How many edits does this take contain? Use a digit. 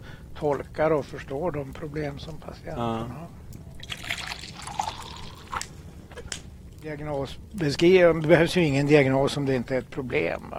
0